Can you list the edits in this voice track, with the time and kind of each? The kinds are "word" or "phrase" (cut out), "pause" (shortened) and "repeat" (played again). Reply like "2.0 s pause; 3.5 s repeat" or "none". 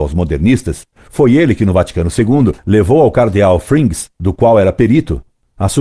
0.9 s pause; 2.6 s pause; 4.1 s pause

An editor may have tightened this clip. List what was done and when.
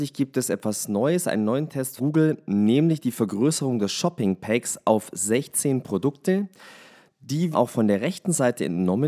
2.0 s word; 7.5 s word

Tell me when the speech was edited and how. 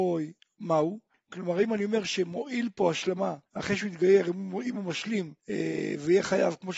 1.1 s pause; 3.5 s pause; 5.4 s pause

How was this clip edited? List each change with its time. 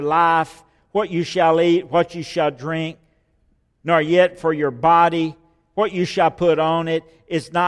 none

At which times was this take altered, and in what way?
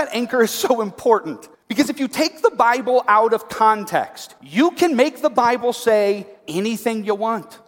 1.5 s pause; 4.4 s pause; 6.4 s pause

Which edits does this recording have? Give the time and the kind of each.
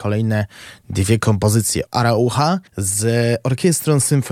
1.9 s word; 2.7 s pause

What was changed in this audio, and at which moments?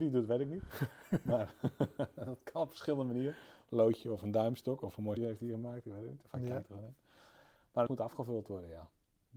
5.2 s word; 7.9 s word

